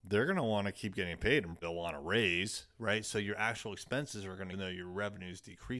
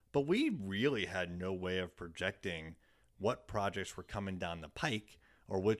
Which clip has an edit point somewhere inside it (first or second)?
first